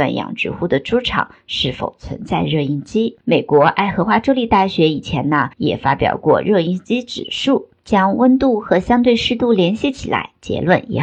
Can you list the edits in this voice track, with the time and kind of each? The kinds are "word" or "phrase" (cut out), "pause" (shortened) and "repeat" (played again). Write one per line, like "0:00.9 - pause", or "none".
0:03.2 - pause
0:05.5 - pause